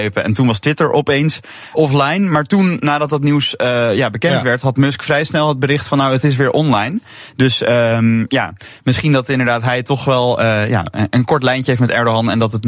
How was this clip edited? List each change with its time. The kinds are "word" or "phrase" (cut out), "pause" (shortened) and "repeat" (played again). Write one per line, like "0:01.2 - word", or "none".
0:01.7 - word